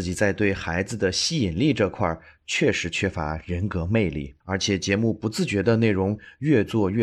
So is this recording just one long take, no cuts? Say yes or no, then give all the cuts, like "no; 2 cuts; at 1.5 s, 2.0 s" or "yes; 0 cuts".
no; 1 cut; at 4.4 s